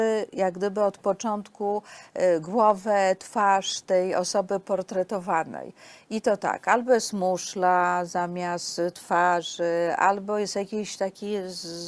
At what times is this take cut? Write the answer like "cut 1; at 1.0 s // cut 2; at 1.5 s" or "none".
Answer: none